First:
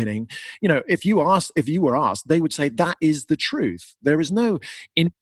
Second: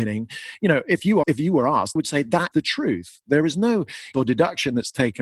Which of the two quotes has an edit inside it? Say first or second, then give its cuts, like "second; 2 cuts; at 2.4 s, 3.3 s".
second; 4 cuts; at 1.2 s, 2.0 s, 2.5 s, 4.1 s